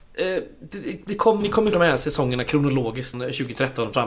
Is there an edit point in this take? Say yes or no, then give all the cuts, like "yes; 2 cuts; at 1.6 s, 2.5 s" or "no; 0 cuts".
yes; 3 cuts; at 1.4 s, 1.7 s, 3.1 s